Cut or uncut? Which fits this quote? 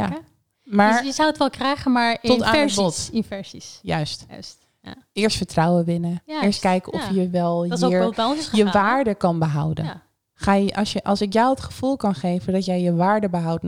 uncut